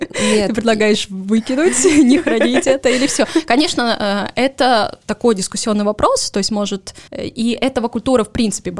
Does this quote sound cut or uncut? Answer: cut